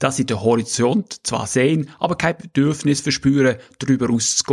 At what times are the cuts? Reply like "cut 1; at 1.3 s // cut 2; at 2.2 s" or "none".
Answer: none